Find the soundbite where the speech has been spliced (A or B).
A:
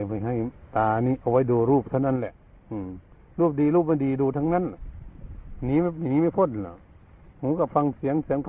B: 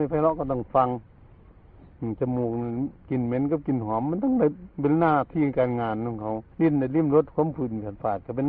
B